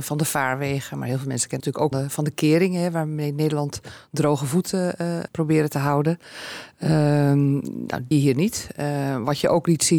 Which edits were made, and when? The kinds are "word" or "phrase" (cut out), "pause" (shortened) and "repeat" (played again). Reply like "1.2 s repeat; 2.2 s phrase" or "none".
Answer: 1.6 s word; 1.9 s word; 5.3 s word; 8.1 s phrase